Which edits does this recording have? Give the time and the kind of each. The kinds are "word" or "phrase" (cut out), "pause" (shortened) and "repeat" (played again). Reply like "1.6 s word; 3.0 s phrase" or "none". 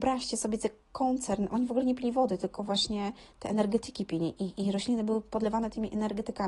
none